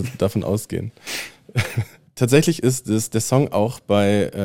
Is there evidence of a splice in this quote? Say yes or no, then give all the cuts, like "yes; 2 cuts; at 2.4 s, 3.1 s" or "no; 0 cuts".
no; 0 cuts